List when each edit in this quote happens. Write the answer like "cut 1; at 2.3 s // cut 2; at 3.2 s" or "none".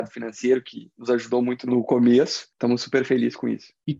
none